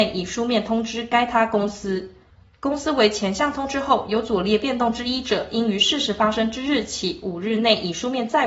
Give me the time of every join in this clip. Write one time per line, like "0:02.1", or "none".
0:02.3

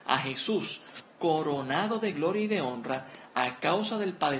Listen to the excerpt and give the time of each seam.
none

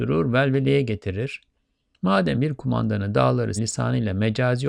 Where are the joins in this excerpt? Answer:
0:02.3
0:03.6

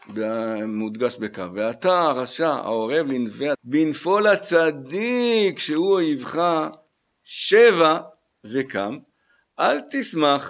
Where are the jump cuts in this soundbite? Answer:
0:03.5

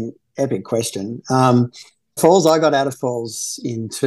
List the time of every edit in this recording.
0:02.2

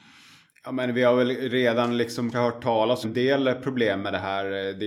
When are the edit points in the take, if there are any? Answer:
0:02.3
0:03.0

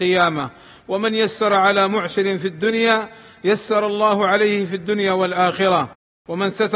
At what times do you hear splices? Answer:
none

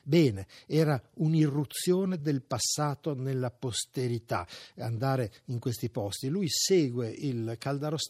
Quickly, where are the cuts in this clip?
none

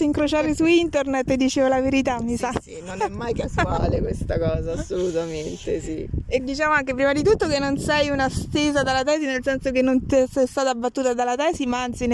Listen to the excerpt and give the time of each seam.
0:06.4

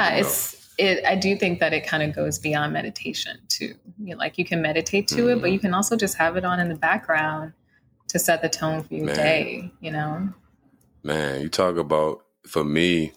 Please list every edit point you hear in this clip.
none

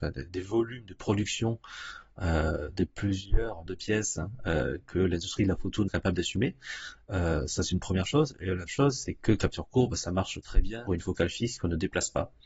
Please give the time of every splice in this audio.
0:03.7
0:05.9
0:08.7
0:10.9

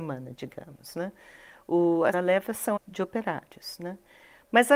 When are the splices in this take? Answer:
0:02.1
0:02.8

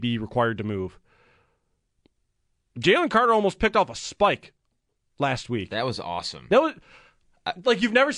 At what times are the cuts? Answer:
none

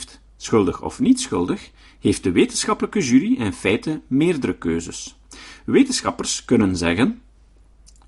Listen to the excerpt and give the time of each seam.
none

